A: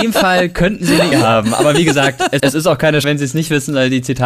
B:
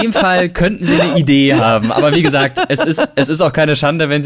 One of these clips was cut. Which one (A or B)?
A